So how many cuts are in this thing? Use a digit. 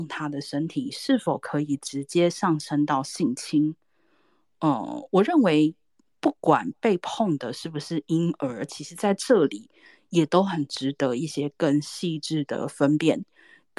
0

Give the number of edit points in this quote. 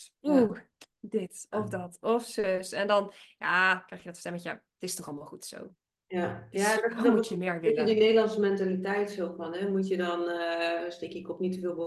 0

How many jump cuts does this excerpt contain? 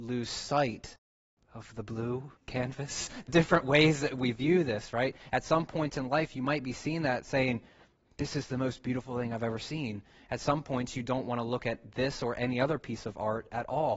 1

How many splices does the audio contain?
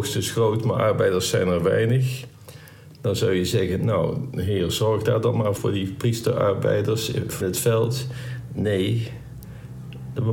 2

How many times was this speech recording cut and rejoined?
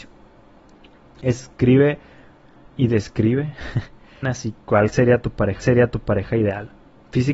2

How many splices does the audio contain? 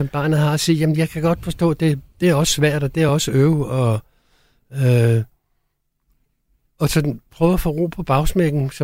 0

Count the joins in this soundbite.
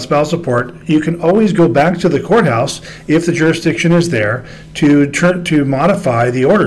0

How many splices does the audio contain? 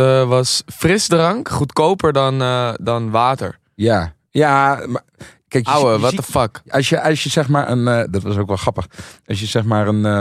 0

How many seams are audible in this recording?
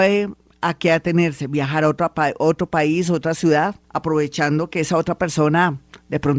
1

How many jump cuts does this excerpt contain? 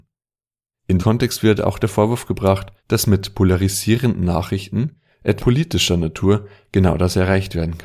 3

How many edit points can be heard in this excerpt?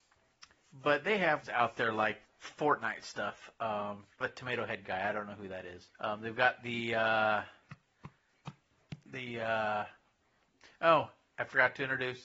4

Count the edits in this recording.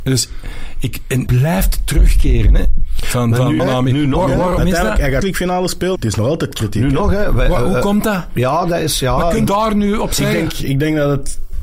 6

